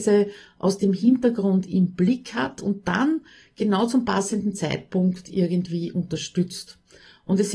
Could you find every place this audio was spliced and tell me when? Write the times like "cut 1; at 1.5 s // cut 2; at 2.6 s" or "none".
none